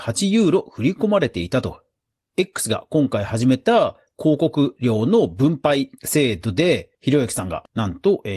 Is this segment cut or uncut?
uncut